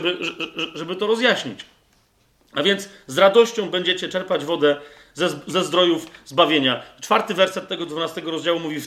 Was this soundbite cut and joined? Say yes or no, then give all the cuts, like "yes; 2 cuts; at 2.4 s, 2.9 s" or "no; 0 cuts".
no; 0 cuts